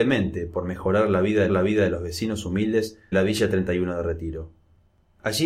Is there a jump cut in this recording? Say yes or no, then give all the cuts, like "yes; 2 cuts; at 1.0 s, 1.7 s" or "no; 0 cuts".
yes; 2 cuts; at 1.5 s, 3.1 s